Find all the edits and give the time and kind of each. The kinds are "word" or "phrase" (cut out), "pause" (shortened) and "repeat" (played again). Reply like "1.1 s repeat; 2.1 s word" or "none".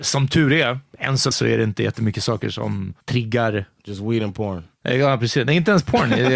1.3 s word; 3.0 s pause